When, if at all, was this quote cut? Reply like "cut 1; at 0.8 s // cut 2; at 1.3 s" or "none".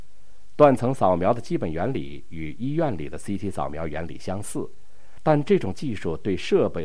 none